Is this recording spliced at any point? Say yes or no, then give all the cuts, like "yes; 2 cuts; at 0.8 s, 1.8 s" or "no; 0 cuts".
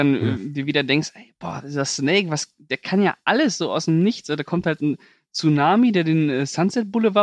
no; 0 cuts